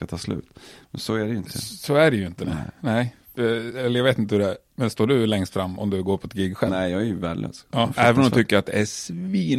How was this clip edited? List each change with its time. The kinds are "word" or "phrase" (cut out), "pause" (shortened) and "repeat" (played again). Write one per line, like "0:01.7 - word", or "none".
none